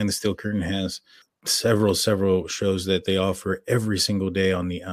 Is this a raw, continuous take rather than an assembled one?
yes; 0 cuts

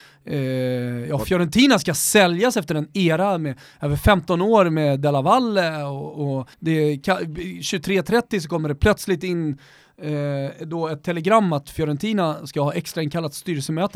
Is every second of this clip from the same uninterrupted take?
no; 1 cut; at 6.5 s

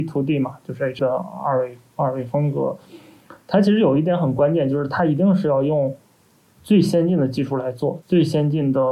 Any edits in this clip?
yes; 1 cut; at 1.0 s

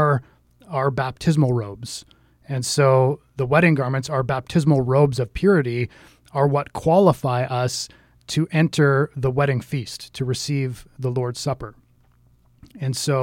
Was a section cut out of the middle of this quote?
no; 0 cuts

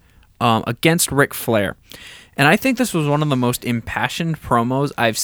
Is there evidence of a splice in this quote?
no; 0 cuts

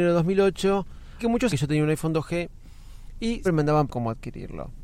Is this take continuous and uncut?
no; 4 cuts; at 1.2 s, 1.5 s, 3.4 s, 3.9 s

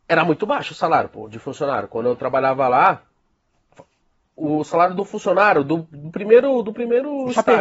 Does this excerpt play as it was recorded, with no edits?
yes; 0 cuts

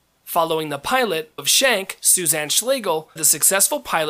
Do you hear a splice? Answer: yes; 2 cuts; at 1.4 s, 3.2 s

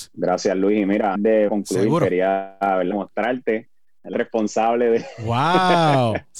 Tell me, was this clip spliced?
yes; 4 cuts; at 1.2 s, 1.5 s, 2.9 s, 4.1 s

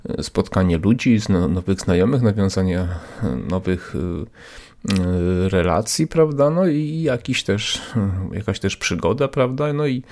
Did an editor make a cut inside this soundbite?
no; 0 cuts

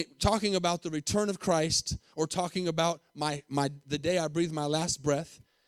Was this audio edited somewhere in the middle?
no; 0 cuts

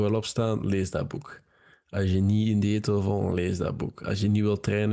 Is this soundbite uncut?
yes; 0 cuts

